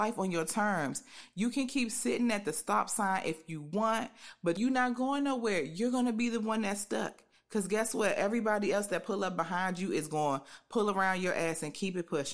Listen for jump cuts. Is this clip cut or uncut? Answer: uncut